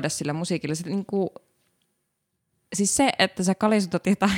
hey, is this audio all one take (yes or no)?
yes